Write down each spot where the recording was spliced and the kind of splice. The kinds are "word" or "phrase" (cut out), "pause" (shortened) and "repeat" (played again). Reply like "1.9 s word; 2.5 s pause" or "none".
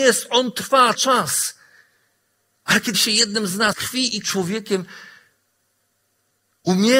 0.9 s word; 2.9 s word; 3.7 s word; 4.2 s word